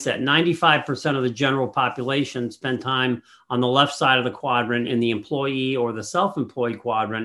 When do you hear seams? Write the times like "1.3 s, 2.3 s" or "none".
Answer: none